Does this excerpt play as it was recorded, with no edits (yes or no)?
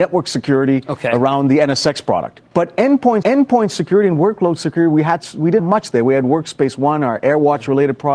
no